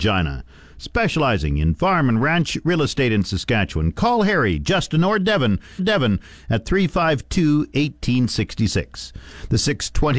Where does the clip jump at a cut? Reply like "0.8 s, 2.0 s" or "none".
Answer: 5.8 s